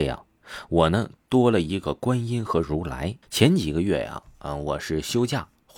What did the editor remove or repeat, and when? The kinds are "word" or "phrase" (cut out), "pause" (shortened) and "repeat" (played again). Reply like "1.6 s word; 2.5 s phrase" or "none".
3.2 s pause